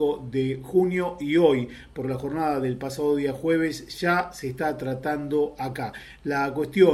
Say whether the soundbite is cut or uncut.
uncut